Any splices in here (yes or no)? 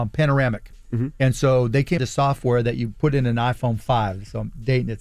yes